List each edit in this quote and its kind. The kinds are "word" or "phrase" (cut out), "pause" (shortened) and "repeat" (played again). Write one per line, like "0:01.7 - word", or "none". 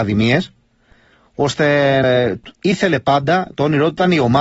0:02.0 - word

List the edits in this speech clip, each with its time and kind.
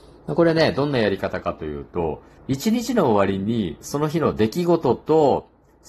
0:02.4 - pause

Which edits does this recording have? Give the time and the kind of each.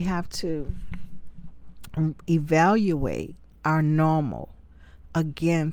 0:03.6 - pause

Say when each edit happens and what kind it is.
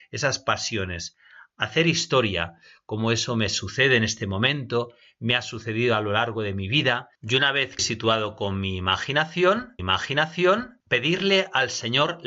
0:07.8 - word
0:09.8 - repeat

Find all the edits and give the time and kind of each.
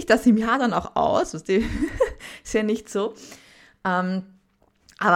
none

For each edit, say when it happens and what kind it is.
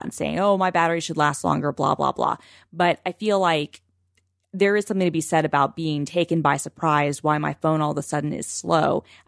none

